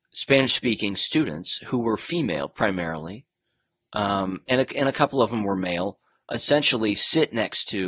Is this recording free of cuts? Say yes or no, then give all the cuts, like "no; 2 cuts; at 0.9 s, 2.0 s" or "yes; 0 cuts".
yes; 0 cuts